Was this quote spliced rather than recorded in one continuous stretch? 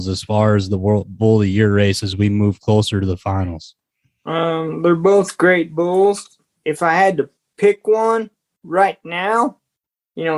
no; 0 cuts

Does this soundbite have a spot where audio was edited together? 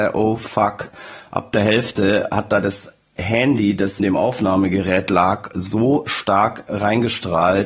yes; 1 cut; at 4.0 s

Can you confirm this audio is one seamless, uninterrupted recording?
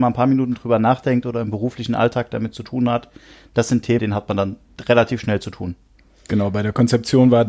no; 1 cut; at 4.0 s

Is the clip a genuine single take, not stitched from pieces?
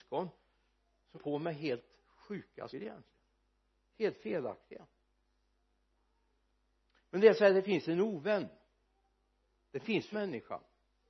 no; 3 cuts; at 1.1 s, 2.7 s, 10.1 s

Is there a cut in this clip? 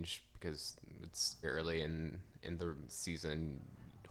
yes; 2 cuts; at 1.4 s, 2.9 s

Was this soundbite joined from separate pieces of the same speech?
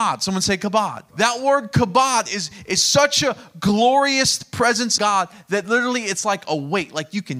yes; 2 cuts; at 1.1 s, 5.0 s

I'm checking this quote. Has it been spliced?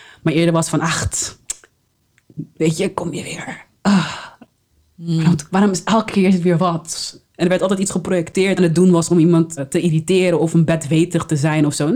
yes; 3 cuts; at 5.5 s, 8.6 s, 9.6 s

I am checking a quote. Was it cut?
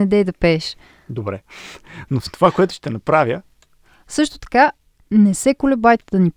no; 0 cuts

